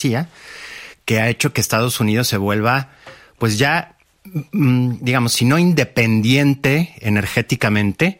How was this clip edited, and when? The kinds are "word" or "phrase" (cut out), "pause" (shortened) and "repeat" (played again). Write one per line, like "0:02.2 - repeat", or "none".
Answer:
none